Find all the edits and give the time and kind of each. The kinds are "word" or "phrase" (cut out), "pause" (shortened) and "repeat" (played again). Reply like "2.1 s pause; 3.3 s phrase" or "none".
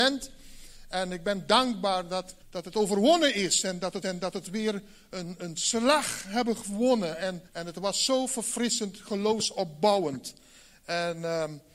2.4 s pause; 4.0 s repeat; 7.5 s pause